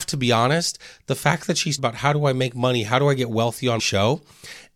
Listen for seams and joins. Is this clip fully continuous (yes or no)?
no